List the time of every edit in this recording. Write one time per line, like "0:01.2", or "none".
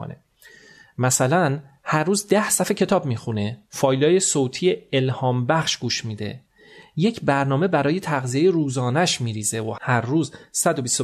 0:03.6